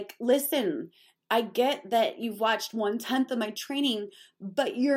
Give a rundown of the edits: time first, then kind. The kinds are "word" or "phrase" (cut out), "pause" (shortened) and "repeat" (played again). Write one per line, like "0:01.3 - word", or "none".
none

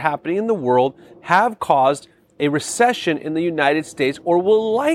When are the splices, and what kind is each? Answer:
none

